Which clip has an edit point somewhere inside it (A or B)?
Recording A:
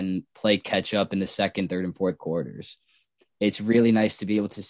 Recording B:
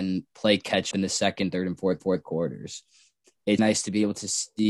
B